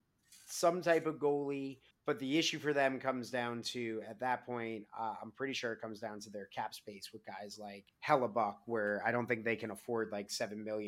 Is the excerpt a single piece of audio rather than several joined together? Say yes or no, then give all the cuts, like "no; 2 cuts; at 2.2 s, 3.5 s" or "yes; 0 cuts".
no; 2 cuts; at 1.9 s, 7.9 s